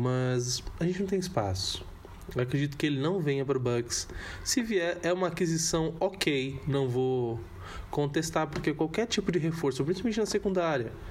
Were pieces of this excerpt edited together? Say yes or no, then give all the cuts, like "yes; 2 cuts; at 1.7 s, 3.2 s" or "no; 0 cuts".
no; 0 cuts